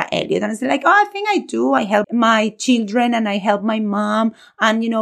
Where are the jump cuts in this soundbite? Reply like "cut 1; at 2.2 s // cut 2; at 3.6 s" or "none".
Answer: cut 1; at 2.0 s